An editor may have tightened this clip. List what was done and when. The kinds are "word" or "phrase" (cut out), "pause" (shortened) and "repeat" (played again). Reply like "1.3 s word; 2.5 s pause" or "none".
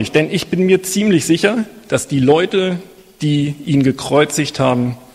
none